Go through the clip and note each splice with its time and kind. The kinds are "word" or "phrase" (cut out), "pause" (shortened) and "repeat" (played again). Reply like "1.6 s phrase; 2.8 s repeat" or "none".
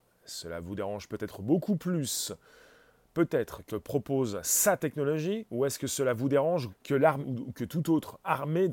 3.7 s word; 6.7 s word; 7.2 s word

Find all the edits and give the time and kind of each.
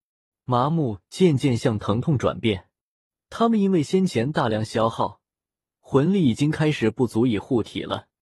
none

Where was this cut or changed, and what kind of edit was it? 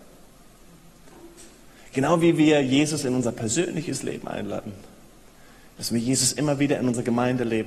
none

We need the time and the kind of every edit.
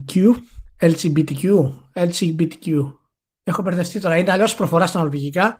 none

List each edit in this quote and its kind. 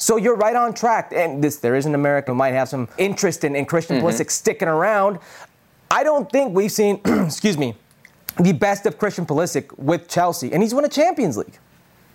2.3 s word; 3.0 s word

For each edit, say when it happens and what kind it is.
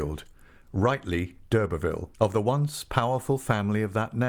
2.1 s pause

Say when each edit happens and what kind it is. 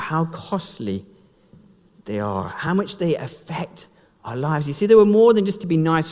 none

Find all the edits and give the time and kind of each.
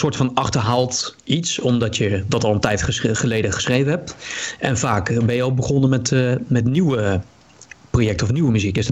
none

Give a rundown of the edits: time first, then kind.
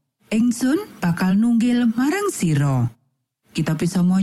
none

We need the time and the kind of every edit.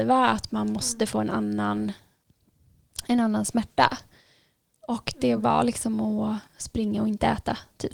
none

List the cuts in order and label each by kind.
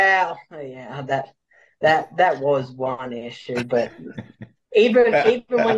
none

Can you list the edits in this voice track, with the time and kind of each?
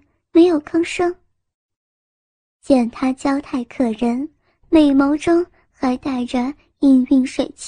none

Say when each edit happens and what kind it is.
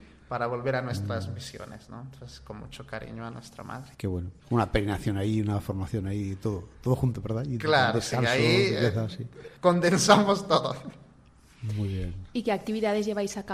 3.9 s pause; 4.4 s pause; 9.6 s pause

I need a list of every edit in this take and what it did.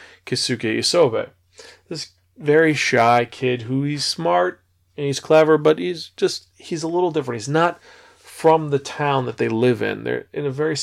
none

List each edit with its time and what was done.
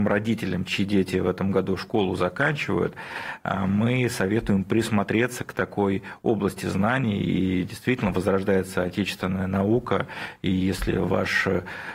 none

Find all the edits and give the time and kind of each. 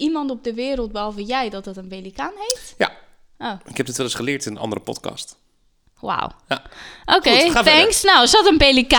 none

